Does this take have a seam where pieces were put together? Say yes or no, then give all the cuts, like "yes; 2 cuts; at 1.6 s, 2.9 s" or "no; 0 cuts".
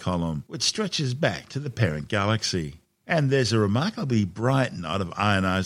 no; 0 cuts